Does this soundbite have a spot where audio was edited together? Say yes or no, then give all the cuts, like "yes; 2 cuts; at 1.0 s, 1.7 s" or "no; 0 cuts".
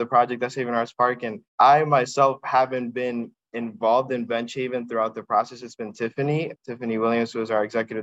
yes; 2 cuts; at 1.5 s, 6.6 s